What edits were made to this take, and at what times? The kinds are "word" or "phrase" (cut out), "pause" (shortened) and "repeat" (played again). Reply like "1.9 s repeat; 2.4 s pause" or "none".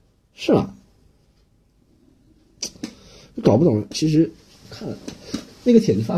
none